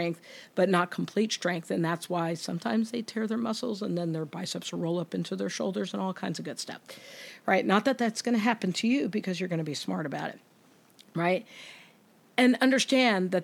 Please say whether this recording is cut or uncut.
uncut